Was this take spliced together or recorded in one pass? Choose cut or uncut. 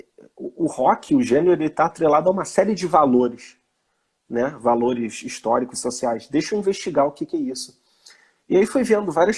uncut